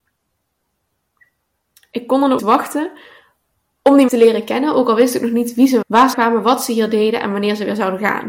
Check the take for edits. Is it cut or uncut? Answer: cut